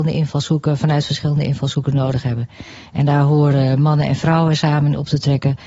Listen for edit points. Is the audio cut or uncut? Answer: uncut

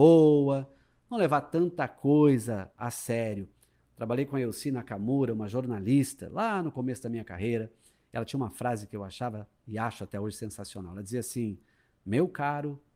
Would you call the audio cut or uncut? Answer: uncut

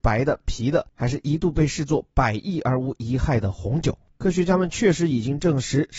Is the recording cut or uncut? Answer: uncut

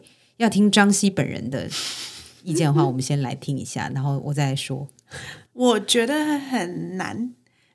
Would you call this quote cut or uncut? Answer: cut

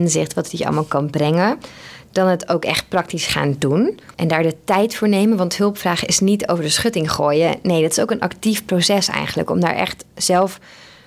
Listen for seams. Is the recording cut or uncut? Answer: cut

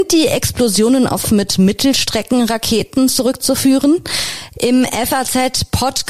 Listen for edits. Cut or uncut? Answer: cut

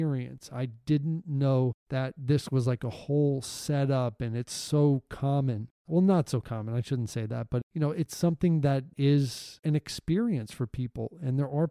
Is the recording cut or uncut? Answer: uncut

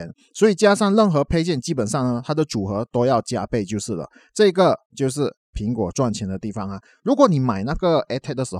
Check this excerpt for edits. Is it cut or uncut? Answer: uncut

